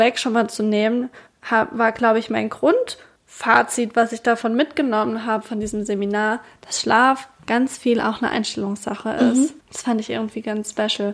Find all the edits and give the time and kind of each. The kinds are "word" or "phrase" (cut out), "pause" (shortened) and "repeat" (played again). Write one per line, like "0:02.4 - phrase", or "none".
0:09.6 - pause